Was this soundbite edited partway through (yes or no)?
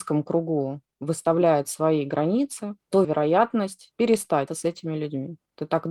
yes